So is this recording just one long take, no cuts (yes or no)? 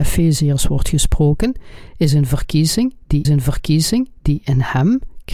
no